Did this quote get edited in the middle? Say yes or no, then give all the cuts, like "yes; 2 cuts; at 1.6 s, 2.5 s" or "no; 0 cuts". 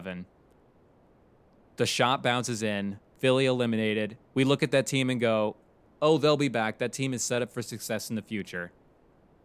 yes; 1 cut; at 4.2 s